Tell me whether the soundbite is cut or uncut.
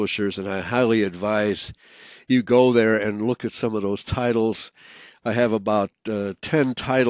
uncut